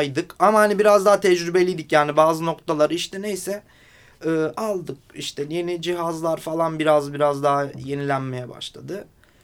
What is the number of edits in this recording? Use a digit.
0